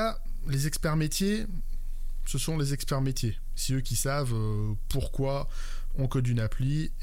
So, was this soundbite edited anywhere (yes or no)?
no